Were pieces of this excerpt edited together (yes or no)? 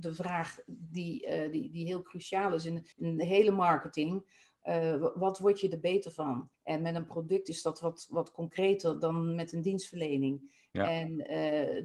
yes